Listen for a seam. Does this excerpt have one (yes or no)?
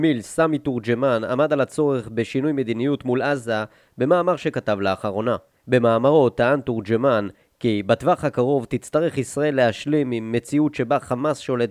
no